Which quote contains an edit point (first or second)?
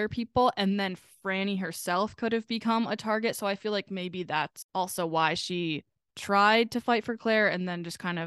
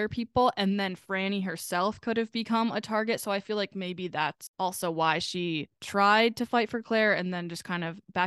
second